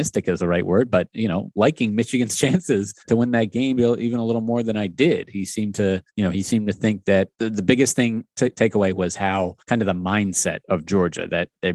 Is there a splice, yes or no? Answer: yes